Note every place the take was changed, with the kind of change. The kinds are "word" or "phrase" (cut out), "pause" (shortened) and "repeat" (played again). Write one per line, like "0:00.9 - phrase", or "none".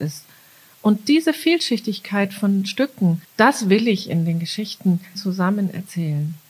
0:03.2 - pause
0:05.1 - word